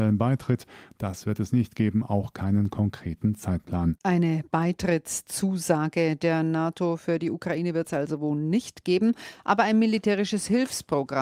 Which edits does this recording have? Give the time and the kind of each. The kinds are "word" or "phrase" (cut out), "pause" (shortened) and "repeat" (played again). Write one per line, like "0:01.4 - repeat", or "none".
0:04.0 - pause